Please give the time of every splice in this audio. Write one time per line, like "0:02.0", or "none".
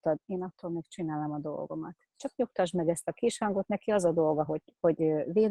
none